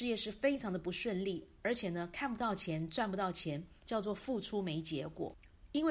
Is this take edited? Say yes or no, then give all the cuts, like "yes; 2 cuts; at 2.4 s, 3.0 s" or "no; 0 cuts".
yes; 1 cut; at 3.8 s